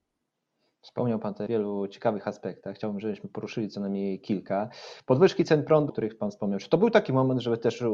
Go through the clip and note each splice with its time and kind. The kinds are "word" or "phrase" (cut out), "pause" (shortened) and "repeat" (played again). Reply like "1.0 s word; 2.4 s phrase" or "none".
1.5 s word; 5.9 s phrase